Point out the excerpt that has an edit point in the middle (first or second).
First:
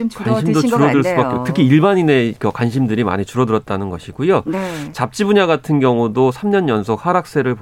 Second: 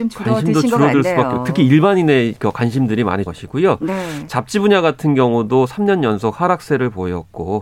second